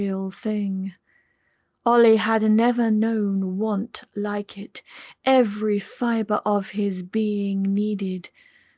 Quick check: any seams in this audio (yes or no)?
no